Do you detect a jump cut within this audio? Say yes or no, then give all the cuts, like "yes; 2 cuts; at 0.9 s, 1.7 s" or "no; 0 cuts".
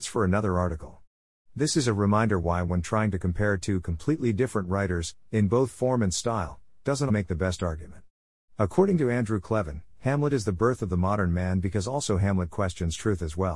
yes; 1 cut; at 7.1 s